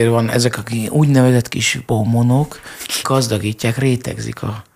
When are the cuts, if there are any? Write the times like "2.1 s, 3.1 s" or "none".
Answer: 1.8 s, 3.0 s